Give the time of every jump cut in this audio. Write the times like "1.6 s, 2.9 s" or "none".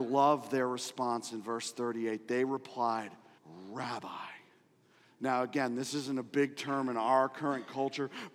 3.4 s